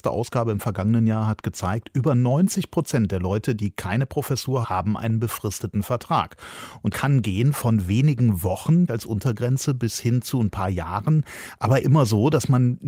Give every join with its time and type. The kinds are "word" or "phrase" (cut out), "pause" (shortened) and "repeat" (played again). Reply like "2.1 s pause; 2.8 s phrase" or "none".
4.6 s word; 6.9 s word; 8.9 s word; 11.8 s word